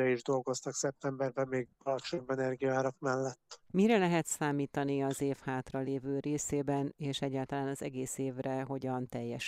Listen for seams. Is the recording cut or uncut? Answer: uncut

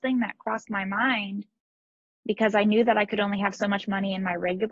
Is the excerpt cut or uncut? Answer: uncut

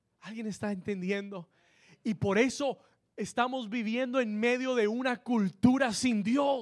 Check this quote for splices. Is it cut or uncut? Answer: uncut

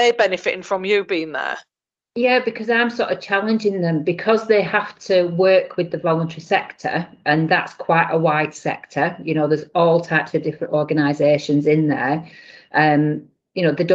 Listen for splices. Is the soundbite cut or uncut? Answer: uncut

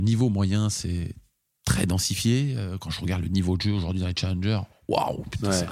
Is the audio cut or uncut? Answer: uncut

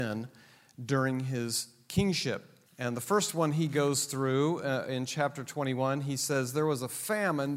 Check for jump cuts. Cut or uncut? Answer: cut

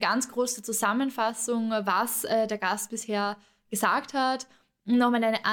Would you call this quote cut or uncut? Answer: uncut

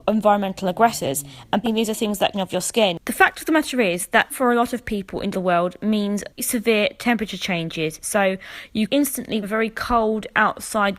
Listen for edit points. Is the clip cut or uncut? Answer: cut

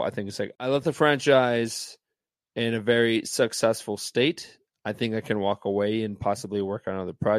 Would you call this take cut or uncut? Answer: uncut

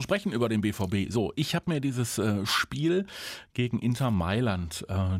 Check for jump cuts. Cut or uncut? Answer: uncut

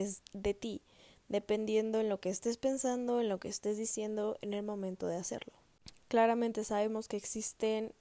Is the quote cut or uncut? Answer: uncut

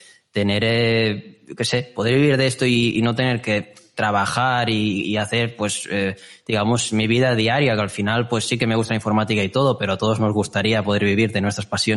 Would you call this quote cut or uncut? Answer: uncut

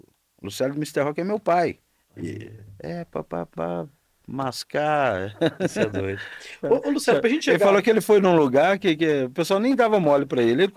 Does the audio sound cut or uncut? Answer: cut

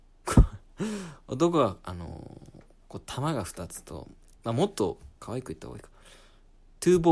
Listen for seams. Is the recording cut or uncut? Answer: cut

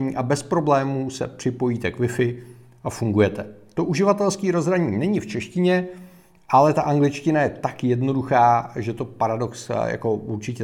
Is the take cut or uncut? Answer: uncut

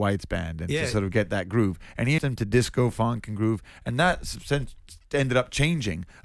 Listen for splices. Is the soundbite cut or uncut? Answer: cut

